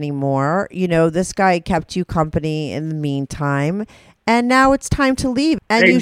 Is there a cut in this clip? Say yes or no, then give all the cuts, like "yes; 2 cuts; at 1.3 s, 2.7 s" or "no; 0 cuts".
no; 0 cuts